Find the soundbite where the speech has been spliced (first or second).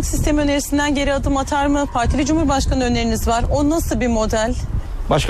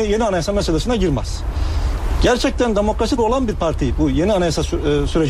second